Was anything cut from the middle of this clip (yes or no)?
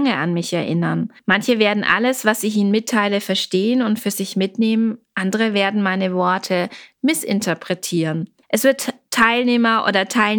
yes